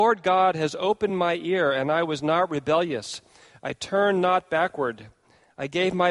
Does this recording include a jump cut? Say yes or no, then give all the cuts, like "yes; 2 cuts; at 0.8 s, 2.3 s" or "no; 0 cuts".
no; 0 cuts